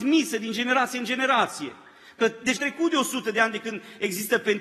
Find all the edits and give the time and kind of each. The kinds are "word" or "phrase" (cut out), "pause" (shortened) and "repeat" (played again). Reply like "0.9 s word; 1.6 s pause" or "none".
2.6 s word